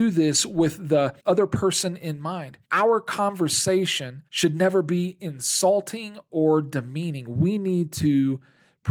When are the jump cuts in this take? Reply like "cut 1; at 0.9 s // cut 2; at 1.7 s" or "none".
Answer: cut 1; at 1.2 s // cut 2; at 2.6 s // cut 3; at 4.3 s